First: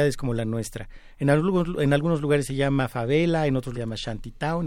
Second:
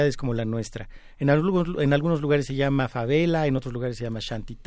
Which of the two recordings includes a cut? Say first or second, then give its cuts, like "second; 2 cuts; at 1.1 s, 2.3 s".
first; 1 cut; at 3.7 s